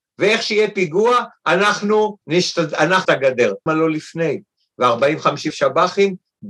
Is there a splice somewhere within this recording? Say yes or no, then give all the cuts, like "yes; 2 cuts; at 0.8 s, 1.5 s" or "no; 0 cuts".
yes; 4 cuts; at 2.2 s, 3.0 s, 3.7 s, 5.5 s